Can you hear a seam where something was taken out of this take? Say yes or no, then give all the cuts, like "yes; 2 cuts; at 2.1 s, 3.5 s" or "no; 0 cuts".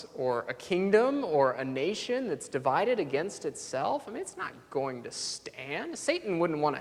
no; 0 cuts